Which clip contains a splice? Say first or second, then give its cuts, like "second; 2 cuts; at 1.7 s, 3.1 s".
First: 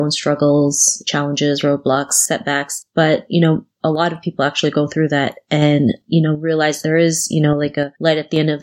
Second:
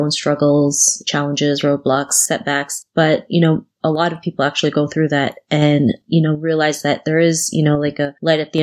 first; 1 cut; at 6.8 s